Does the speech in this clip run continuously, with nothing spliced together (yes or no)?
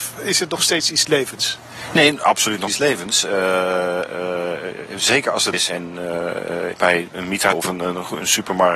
no